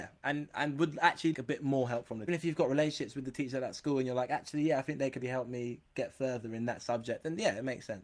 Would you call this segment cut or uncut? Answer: cut